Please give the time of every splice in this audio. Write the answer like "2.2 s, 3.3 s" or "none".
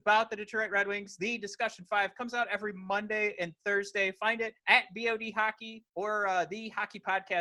4.6 s, 5.9 s